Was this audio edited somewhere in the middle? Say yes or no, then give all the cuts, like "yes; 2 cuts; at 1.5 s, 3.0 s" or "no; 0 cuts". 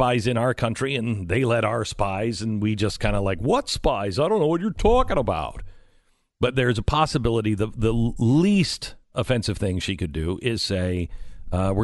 yes; 1 cut; at 9.1 s